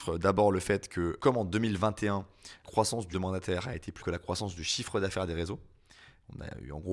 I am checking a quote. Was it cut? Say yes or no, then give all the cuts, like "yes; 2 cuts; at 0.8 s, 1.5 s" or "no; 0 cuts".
yes; 4 cuts; at 1.2 s, 2.6 s, 3.1 s, 4.0 s